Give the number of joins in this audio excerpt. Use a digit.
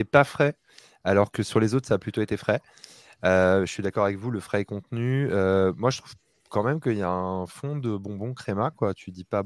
0